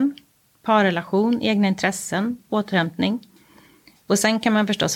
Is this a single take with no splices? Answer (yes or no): yes